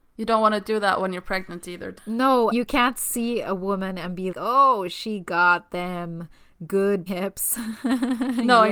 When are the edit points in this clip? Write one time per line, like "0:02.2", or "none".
0:02.0
0:02.5
0:04.3
0:07.1